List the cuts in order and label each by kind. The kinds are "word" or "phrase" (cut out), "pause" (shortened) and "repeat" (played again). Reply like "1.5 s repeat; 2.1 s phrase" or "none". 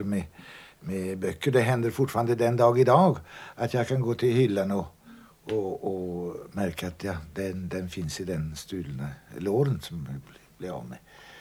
none